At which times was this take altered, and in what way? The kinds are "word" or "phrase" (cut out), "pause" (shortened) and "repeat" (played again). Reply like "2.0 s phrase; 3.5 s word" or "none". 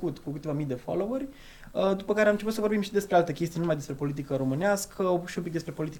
none